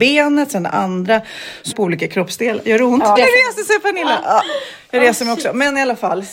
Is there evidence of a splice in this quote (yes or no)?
yes